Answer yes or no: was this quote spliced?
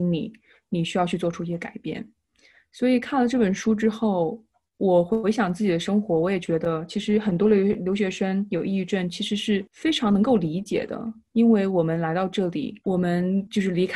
no